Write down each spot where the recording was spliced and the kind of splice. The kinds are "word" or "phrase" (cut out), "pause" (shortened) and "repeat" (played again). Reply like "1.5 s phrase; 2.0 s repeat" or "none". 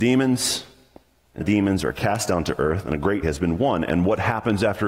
1.4 s phrase; 3.2 s word